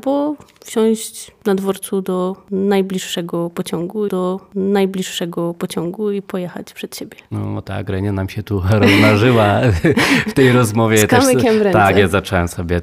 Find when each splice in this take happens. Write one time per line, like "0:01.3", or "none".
0:04.1